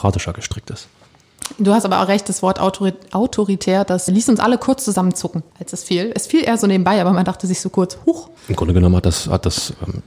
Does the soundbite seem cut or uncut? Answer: cut